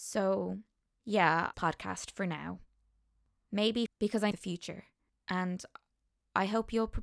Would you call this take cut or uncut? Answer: cut